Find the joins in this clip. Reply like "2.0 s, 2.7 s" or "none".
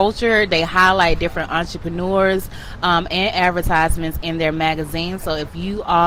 none